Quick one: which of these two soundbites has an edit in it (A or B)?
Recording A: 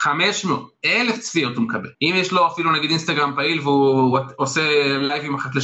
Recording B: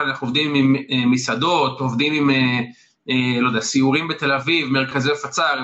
A